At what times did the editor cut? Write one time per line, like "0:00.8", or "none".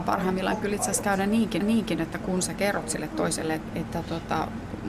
0:01.6
0:03.7